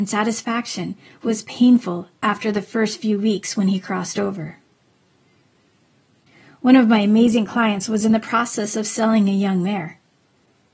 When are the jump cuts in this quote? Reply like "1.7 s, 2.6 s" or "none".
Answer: none